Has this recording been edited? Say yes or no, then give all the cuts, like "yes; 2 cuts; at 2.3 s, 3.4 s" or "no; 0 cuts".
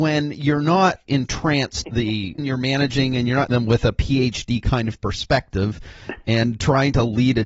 yes; 4 cuts; at 1.1 s, 1.8 s, 2.4 s, 3.5 s